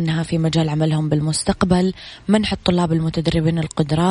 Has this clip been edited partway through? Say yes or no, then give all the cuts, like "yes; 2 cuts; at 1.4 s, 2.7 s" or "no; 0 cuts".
no; 0 cuts